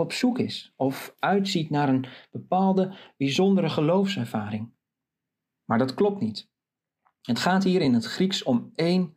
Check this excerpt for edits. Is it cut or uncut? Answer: uncut